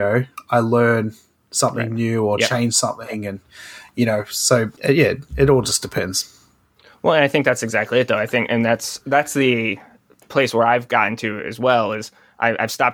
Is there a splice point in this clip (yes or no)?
yes